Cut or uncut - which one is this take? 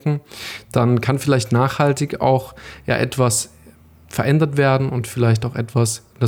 uncut